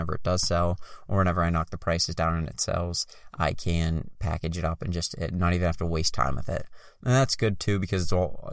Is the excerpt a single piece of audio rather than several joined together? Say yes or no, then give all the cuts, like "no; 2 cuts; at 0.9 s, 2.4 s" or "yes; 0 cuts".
yes; 0 cuts